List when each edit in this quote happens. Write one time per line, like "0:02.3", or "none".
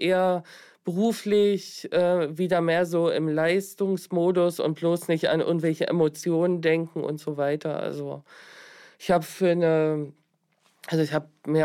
none